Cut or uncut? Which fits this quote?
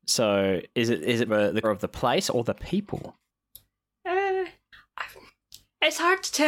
cut